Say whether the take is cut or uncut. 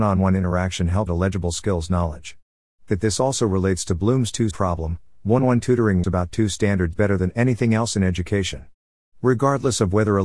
cut